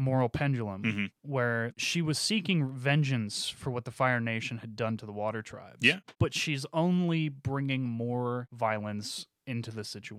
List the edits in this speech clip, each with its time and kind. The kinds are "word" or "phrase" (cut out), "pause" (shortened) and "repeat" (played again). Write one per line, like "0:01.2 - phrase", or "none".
0:01.2 - pause